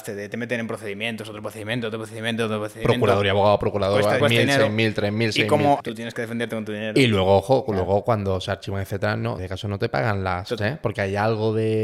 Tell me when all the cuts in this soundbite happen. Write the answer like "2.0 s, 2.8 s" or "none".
4.2 s, 5.8 s, 9.4 s, 10.6 s